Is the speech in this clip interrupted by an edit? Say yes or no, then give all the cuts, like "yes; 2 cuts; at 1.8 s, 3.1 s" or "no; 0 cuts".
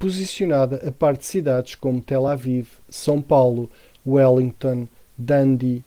no; 0 cuts